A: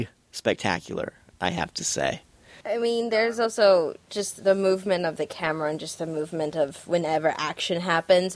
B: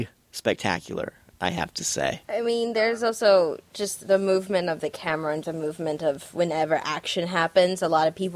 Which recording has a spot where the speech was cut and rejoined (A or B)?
B